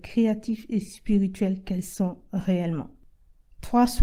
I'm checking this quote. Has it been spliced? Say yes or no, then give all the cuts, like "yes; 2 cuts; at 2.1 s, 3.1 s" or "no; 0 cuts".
no; 0 cuts